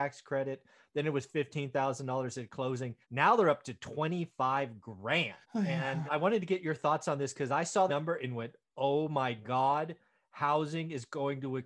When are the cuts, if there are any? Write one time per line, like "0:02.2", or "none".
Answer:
0:03.0
0:05.4
0:06.1
0:07.9